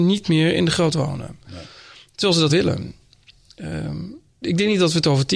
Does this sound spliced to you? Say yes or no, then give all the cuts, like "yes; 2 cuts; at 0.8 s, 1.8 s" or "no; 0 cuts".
yes; 3 cuts; at 0.9 s, 2.5 s, 4.4 s